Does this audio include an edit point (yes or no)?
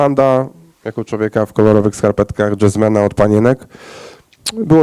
no